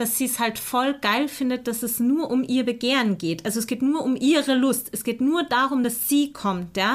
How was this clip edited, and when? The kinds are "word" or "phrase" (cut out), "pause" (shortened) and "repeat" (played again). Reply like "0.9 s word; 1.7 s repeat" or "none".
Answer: none